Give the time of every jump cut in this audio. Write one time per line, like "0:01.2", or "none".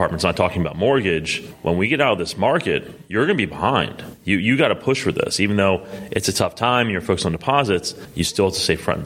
none

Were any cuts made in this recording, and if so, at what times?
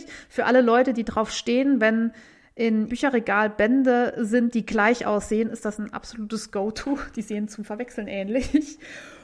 0:02.9

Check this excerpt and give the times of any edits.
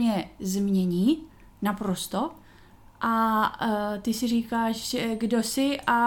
none

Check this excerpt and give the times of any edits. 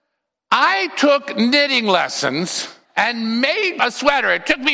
0:02.9
0:03.8

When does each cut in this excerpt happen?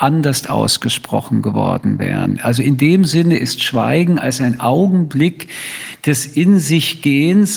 none

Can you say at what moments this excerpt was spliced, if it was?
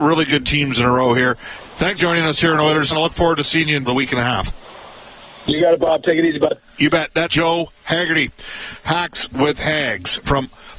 0:02.0
0:02.9
0:03.9
0:07.3

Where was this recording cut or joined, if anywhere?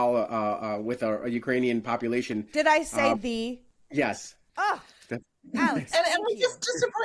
none

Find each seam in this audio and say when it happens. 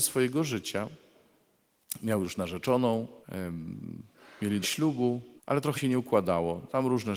0:03.2
0:04.6
0:05.4
0:05.7

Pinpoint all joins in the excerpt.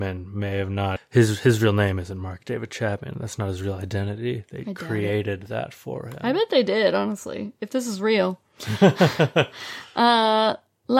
0:01.0

